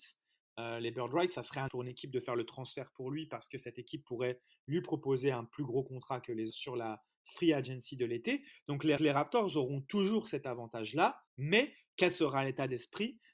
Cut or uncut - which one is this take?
cut